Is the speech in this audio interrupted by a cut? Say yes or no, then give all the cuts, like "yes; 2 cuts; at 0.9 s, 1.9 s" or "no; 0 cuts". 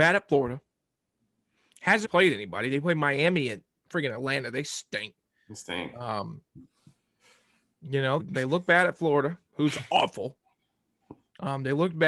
yes; 2 cuts; at 2.0 s, 8.2 s